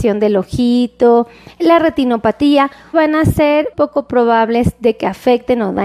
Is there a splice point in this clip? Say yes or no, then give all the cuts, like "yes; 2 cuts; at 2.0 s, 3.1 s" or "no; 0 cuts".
yes; 3 cuts; at 1.6 s, 2.9 s, 3.7 s